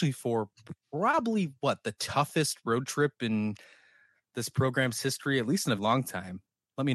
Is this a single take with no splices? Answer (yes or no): no